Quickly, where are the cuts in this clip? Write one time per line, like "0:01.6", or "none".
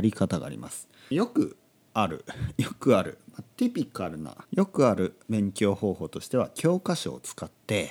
0:01.1
0:04.4